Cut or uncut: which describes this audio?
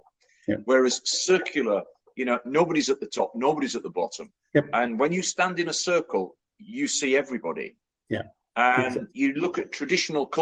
uncut